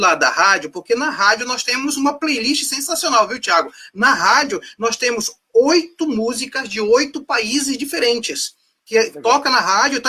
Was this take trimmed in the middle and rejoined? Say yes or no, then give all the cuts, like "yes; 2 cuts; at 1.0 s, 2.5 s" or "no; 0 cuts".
no; 0 cuts